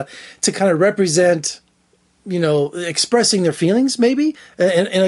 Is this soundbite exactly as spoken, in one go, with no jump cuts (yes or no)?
yes